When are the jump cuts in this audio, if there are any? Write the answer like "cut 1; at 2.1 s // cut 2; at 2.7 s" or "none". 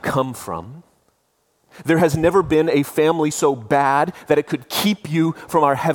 none